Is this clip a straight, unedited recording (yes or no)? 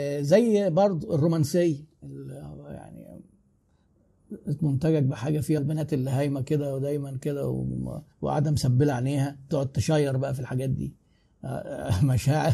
no